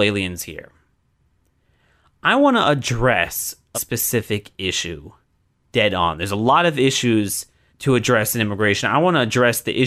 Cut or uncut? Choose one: cut